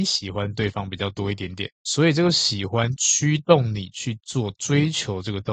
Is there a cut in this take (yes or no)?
yes